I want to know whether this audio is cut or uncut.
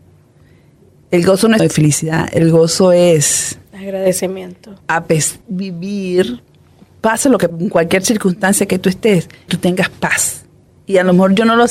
cut